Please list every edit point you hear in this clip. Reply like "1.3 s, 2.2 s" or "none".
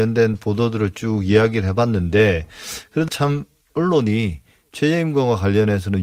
3.1 s